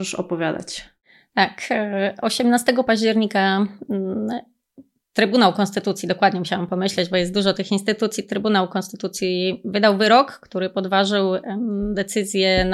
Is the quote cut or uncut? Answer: uncut